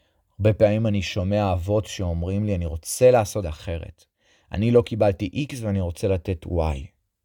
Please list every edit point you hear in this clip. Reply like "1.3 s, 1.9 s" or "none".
3.4 s

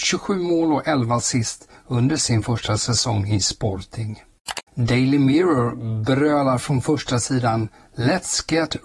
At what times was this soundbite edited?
4.7 s

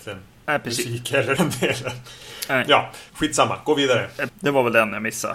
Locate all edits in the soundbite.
1.4 s, 3.1 s, 4.3 s

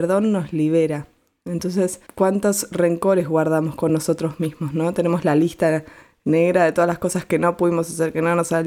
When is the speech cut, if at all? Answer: none

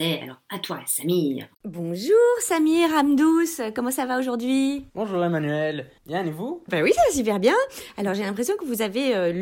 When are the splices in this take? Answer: 1.5 s, 4.9 s, 6.0 s, 6.7 s

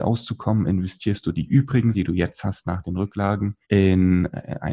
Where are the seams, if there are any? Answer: 1.9 s, 3.6 s

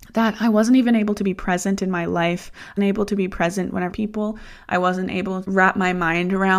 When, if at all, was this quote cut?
2.8 s, 3.9 s, 5.4 s

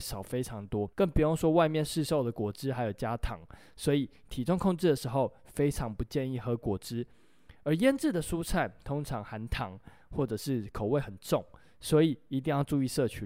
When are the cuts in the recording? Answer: 0.9 s

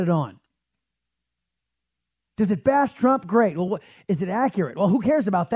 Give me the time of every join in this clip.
none

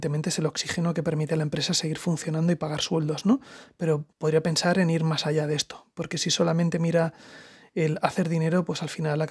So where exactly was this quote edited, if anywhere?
4.1 s

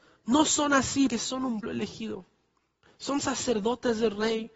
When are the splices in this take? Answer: 1.1 s, 1.6 s

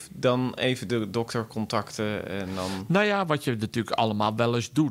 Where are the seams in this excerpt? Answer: none

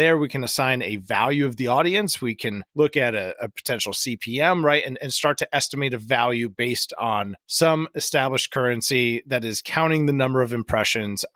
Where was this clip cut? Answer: 2.7 s, 7.4 s

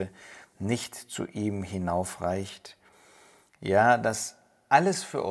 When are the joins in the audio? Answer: none

